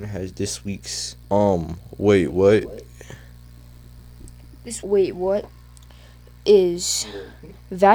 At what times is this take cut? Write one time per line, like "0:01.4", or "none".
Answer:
0:01.2
0:04.8